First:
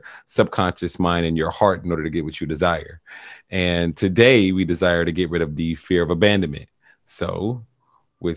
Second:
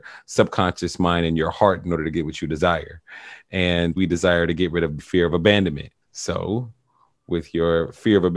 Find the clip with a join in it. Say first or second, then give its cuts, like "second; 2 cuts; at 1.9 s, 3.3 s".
second; 3 cuts; at 4.0 s, 5.0 s, 6.0 s